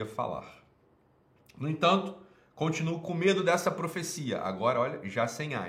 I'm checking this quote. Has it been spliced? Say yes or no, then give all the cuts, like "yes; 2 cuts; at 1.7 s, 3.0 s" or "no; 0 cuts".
no; 0 cuts